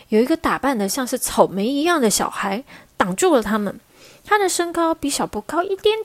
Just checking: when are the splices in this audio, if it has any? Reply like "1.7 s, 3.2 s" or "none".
none